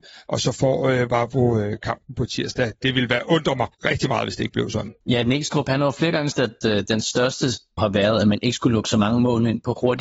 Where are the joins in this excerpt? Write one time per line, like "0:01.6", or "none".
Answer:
0:03.7
0:05.0
0:06.3
0:07.8